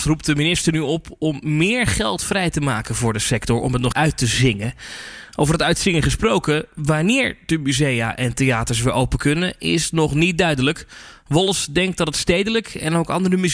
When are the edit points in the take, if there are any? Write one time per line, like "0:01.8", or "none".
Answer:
0:03.9